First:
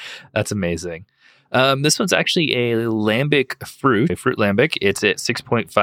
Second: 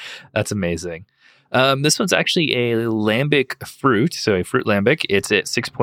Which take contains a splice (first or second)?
first